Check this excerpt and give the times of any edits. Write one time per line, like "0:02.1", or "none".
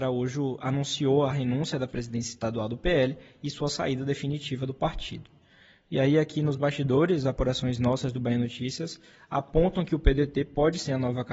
none